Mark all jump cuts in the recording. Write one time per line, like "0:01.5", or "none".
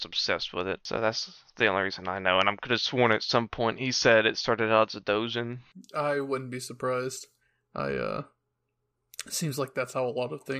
none